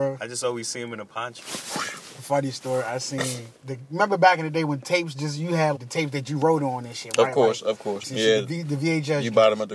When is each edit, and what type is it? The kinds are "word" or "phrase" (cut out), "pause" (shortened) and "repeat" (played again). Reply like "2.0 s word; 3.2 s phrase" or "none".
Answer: 3.6 s pause; 5.8 s word; 8.0 s phrase